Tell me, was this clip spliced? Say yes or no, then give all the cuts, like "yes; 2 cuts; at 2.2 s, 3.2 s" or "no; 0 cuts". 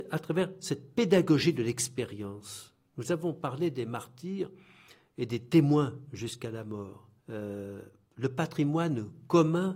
yes; 2 cuts; at 2.9 s, 7.2 s